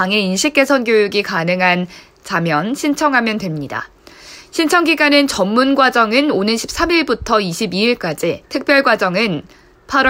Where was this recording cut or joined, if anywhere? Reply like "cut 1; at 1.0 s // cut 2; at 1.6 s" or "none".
cut 1; at 8.4 s